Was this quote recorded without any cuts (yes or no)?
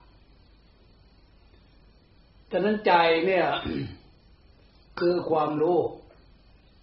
yes